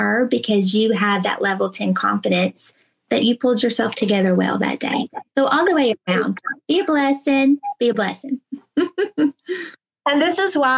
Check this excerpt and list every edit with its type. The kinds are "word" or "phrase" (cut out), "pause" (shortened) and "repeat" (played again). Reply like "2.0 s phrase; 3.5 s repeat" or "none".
none